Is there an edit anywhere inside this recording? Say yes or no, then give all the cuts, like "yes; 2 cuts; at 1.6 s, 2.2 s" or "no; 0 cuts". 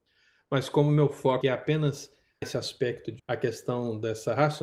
yes; 3 cuts; at 1.4 s, 2.4 s, 3.2 s